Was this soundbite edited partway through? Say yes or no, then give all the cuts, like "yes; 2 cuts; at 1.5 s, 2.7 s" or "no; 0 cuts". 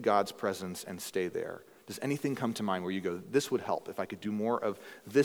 no; 0 cuts